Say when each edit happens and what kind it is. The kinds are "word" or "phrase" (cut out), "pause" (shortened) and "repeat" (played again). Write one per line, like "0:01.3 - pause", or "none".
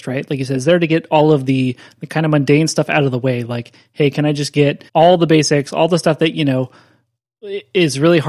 0:04.9 - pause